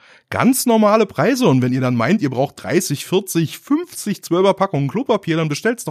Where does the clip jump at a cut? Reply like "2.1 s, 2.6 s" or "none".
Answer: none